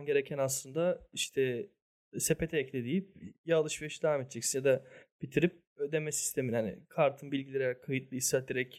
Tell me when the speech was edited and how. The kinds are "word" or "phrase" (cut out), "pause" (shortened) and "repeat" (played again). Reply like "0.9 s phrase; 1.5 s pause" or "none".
none